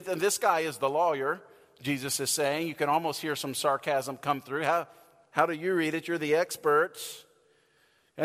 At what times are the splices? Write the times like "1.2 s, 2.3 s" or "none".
none

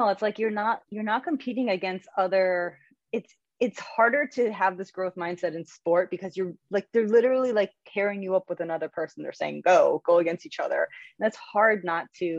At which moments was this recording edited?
none

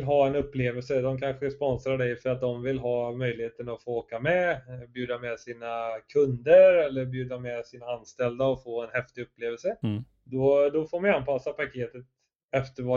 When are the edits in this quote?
none

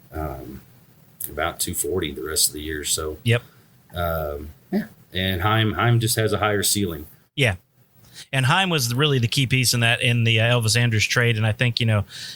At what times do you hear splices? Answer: none

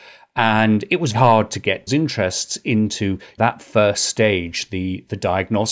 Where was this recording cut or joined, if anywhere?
1.1 s, 1.9 s, 3.4 s

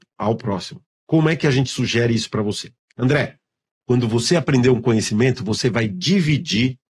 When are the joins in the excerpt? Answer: none

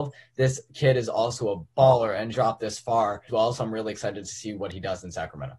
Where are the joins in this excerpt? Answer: 2.3 s, 3.3 s

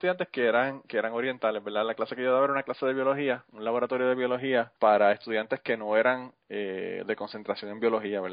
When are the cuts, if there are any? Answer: 4.8 s

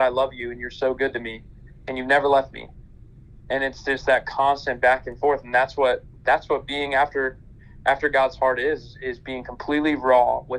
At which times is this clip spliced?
6.2 s

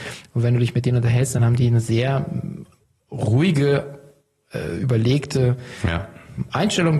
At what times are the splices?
none

